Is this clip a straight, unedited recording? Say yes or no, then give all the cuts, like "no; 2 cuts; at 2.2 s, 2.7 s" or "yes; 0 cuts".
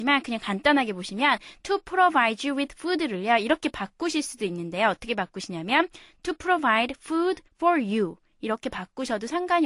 no; 1 cut; at 7.5 s